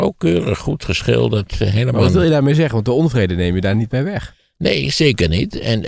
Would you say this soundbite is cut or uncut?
uncut